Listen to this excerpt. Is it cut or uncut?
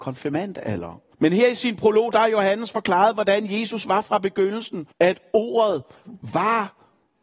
cut